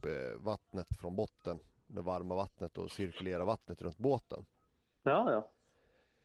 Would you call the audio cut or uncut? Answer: uncut